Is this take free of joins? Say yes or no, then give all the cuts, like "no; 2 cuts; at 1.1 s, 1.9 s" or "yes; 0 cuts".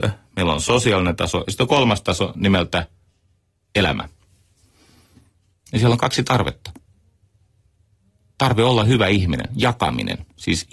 yes; 0 cuts